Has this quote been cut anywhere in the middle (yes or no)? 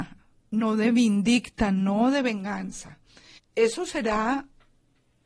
yes